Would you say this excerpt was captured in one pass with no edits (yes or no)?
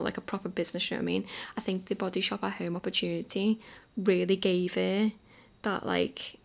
yes